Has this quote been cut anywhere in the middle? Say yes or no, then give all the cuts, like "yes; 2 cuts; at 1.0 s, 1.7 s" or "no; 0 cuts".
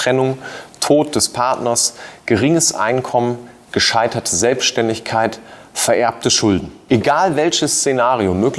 no; 0 cuts